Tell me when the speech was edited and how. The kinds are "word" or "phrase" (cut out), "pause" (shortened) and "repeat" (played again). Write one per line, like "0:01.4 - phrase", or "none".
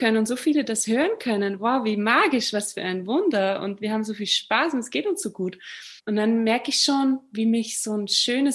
0:06.0 - pause